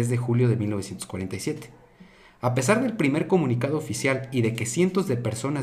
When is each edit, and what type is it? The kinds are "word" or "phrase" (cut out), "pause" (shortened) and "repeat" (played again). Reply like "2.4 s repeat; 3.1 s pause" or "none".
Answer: none